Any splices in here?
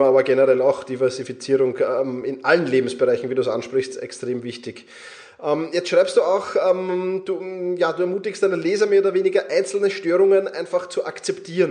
no; 0 cuts

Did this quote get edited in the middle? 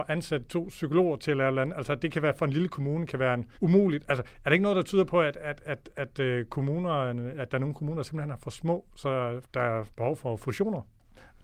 yes; 3 cuts; at 3.5 s, 9.5 s, 9.9 s

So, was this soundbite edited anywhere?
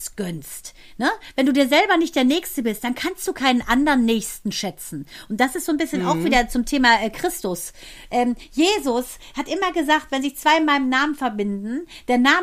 no; 0 cuts

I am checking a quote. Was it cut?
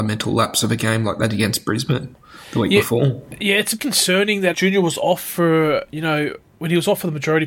yes; 2 cuts; at 3.8 s, 4.5 s

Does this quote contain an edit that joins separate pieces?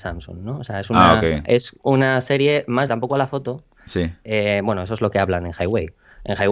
yes; 2 cuts; at 1.8 s, 2.9 s

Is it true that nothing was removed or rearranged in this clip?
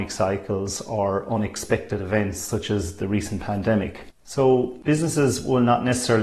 yes; 0 cuts

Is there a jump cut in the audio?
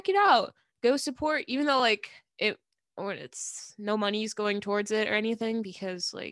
no; 0 cuts

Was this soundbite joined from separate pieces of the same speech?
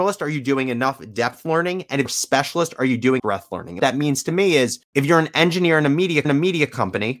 yes; 5 cuts; at 2.0 s, 3.2 s, 3.8 s, 4.9 s, 6.2 s

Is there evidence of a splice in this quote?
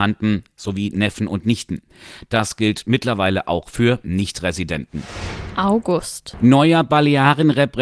no; 0 cuts

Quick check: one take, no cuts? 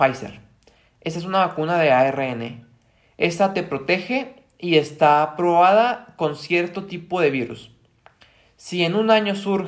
yes; 0 cuts

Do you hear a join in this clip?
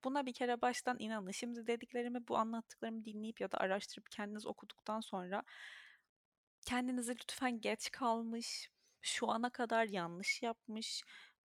no; 0 cuts

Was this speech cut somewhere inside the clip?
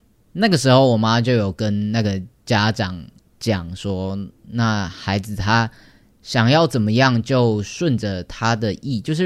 no; 0 cuts

